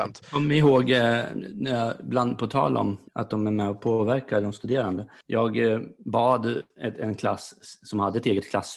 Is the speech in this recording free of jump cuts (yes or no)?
no